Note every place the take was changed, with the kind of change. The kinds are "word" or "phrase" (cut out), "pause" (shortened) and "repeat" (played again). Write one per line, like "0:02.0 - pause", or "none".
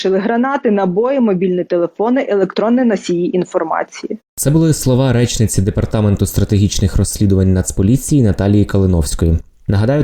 0:04.2 - pause